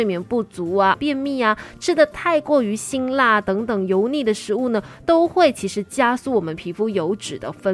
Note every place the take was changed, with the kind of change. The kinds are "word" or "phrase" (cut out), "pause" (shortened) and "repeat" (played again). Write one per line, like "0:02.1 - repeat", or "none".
0:00.9 - phrase